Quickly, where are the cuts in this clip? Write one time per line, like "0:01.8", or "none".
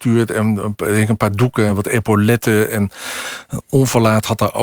none